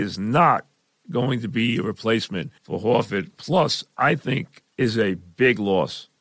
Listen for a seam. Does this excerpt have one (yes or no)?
yes